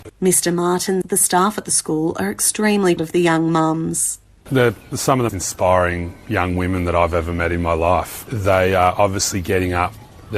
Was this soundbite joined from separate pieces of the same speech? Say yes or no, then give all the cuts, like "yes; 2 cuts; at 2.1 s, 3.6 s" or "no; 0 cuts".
yes; 3 cuts; at 1.0 s, 3.0 s, 5.3 s